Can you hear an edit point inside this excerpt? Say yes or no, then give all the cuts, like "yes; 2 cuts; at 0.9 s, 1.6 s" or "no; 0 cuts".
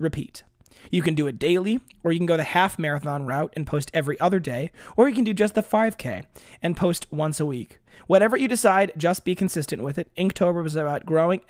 no; 0 cuts